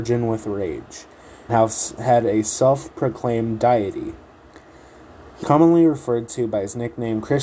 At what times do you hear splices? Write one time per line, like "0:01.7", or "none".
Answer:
0:01.5
0:05.4